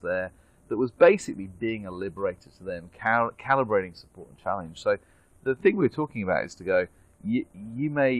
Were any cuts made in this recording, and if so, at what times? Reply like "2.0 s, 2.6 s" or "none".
none